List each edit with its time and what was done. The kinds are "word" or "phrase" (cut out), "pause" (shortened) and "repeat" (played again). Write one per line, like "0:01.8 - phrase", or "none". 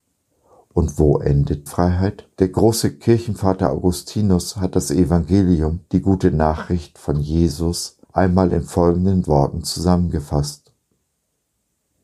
0:01.7 - word
0:02.3 - pause
0:05.9 - pause
0:08.0 - pause
0:09.2 - word